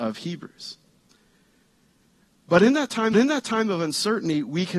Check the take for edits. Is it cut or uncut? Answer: cut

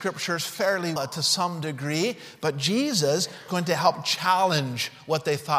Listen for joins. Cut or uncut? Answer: cut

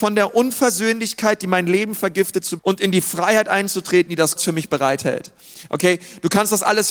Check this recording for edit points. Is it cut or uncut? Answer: cut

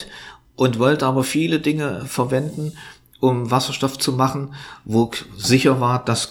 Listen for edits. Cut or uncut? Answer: uncut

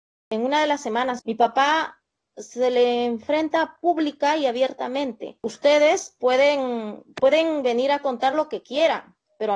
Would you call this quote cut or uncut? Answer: uncut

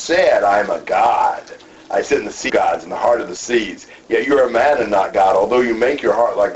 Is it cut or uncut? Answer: cut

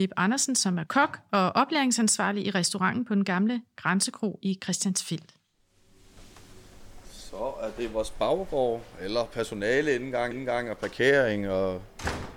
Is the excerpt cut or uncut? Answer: cut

